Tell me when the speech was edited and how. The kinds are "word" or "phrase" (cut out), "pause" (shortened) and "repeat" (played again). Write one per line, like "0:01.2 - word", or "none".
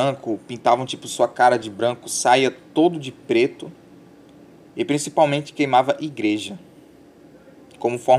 none